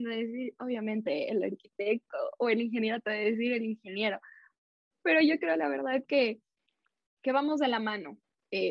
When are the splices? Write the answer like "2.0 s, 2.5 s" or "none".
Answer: none